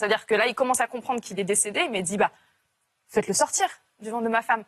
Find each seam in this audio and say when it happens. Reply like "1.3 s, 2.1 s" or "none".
none